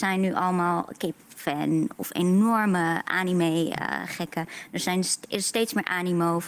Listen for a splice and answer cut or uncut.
uncut